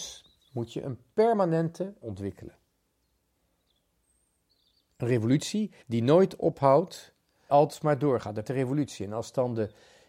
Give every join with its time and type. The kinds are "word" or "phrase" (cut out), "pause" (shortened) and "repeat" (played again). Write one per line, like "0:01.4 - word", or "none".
0:02.0 - phrase
0:05.8 - pause
0:07.5 - word
0:08.4 - word